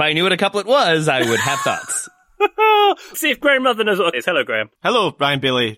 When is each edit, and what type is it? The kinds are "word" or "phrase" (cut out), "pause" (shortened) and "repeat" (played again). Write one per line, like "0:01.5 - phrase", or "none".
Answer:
0:03.1 - word
0:04.1 - word
0:04.8 - pause

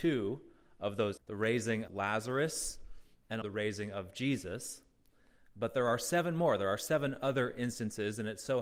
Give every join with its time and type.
0:01.2 - word
0:01.9 - word
0:03.4 - word

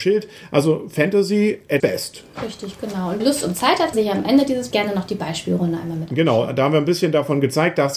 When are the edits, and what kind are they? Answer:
0:01.8 - word
0:03.2 - word
0:03.9 - word
0:04.7 - word

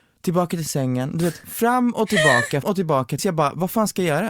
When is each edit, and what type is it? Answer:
0:02.6 - word
0:03.2 - word

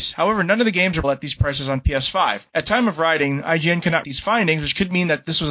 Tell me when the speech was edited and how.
0:01.0 - word
0:02.5 - pause
0:04.0 - word

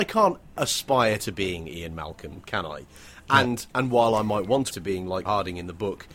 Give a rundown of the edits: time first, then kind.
0:03.7 - pause
0:04.7 - word
0:05.3 - word

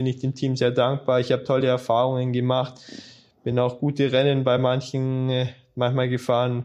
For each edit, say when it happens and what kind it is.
none

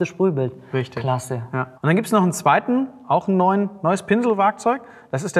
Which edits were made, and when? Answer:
0:01.8 - pause

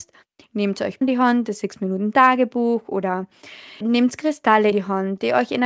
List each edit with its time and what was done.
0:01.0 - word
0:03.8 - word
0:04.7 - word

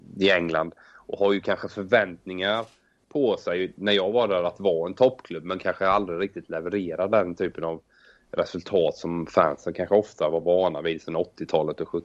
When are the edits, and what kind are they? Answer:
none

